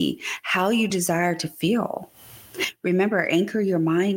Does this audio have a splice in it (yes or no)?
no